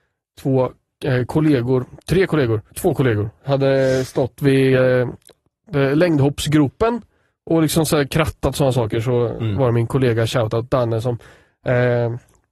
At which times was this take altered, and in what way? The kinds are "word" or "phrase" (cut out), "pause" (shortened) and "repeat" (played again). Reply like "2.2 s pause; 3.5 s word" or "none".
2.7 s pause